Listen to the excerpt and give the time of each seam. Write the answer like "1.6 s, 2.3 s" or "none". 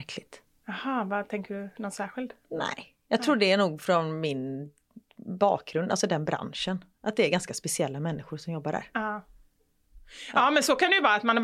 none

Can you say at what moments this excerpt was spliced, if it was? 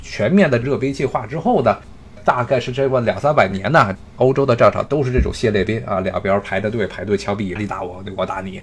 7.6 s

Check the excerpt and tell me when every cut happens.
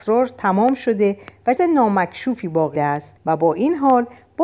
1.6 s, 2.8 s, 3.2 s

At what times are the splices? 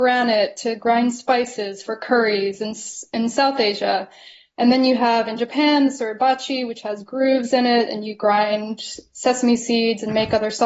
none

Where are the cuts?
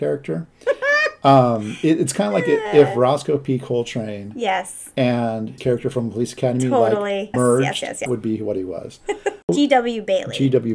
5.6 s, 7.3 s, 8.1 s

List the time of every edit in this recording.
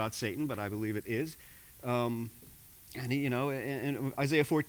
none

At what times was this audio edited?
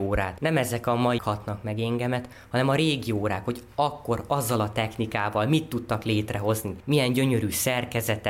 1.2 s

